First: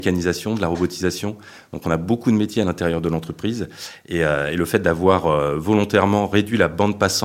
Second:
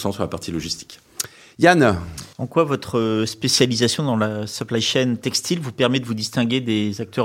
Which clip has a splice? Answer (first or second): second